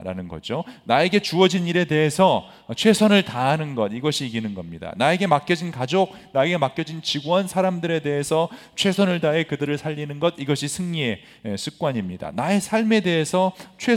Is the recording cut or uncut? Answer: uncut